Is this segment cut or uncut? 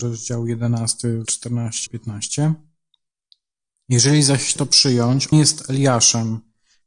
cut